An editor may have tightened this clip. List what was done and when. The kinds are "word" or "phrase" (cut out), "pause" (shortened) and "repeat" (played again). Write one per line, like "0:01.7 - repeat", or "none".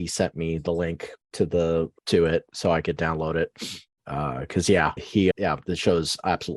0:02.0 - pause
0:05.0 - word
0:05.3 - word